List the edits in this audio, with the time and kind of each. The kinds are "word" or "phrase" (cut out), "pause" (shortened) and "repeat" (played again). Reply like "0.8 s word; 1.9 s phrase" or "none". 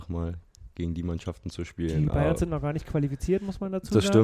none